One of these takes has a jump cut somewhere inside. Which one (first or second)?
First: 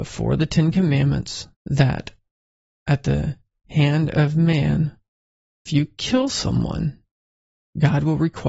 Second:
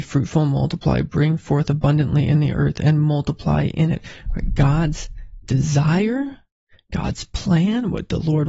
first